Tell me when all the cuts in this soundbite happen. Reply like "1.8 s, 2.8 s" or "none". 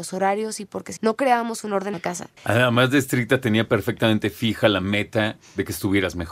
1.0 s, 1.9 s, 2.4 s